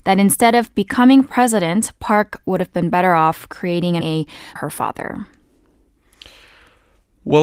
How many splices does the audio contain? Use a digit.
2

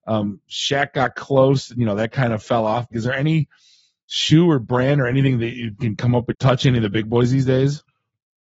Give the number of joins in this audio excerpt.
3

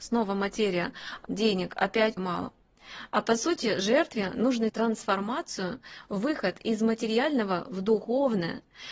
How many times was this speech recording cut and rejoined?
3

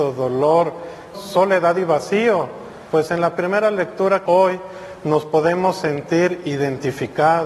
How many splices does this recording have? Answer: 3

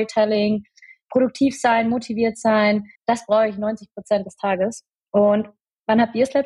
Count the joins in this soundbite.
1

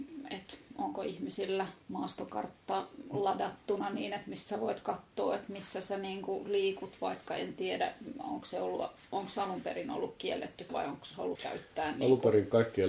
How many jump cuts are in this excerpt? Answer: 3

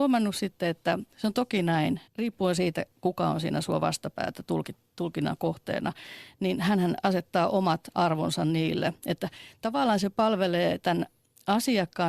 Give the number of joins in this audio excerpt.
2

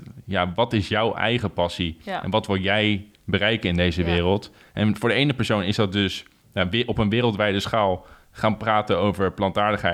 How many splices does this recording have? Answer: 0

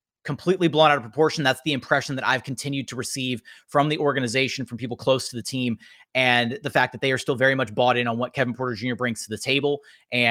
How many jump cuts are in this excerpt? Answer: 0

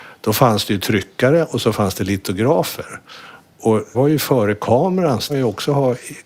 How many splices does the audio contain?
2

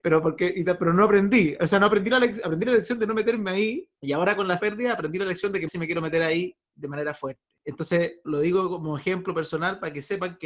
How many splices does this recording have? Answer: 4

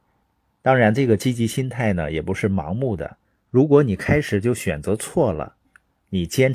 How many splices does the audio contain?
1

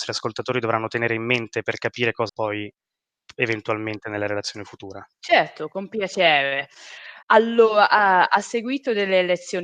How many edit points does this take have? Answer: 3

